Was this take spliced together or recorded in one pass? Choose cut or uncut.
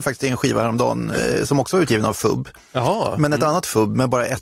uncut